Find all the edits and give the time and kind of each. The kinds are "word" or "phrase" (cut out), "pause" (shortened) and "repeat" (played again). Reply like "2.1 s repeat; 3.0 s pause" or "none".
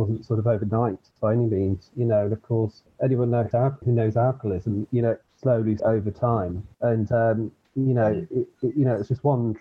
2.9 s pause; 3.5 s word; 3.8 s word; 5.2 s phrase; 5.8 s word; 6.7 s pause